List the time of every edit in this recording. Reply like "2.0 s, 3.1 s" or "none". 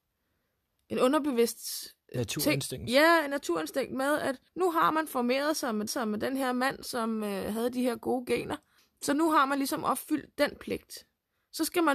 4.5 s, 5.9 s, 8.8 s